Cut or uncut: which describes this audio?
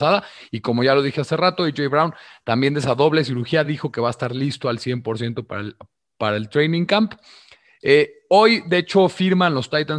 uncut